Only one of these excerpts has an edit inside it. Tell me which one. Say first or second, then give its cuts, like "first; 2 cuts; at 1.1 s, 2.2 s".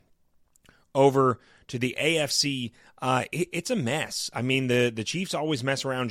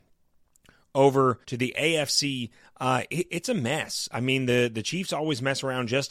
second; 1 cut; at 1.4 s